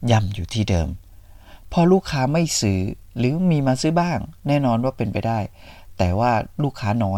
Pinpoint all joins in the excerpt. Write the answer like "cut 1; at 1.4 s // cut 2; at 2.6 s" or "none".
cut 1; at 3.1 s